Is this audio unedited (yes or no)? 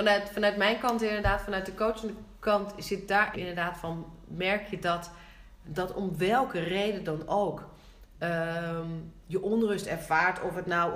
no